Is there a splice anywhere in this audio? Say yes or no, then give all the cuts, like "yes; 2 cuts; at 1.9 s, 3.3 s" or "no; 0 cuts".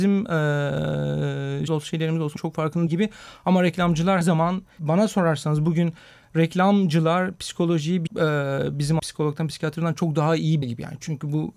yes; 8 cuts; at 1.7 s, 2.4 s, 2.9 s, 4.2 s, 4.8 s, 8.1 s, 9.0 s, 10.6 s